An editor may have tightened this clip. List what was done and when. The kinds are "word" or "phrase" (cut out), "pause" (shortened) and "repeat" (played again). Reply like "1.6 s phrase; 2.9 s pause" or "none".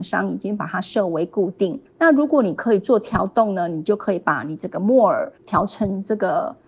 1.9 s pause; 5.4 s pause